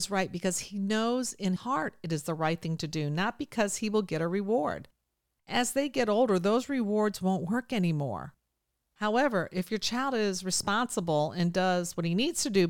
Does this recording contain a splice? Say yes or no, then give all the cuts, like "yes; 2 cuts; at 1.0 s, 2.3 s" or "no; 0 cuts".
yes; 1 cut; at 1.6 s